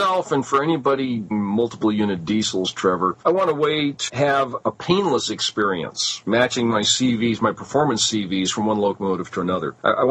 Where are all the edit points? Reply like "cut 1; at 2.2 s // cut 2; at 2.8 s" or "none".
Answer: cut 1; at 1.3 s // cut 2; at 4.1 s